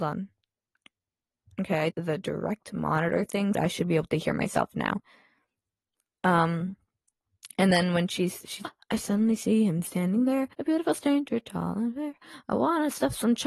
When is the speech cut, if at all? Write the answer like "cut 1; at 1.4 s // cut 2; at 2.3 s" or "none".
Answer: cut 1; at 1.9 s // cut 2; at 3.5 s // cut 3; at 8.6 s // cut 4; at 10.5 s